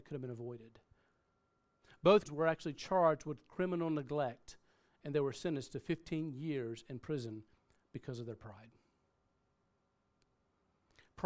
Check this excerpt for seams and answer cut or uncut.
cut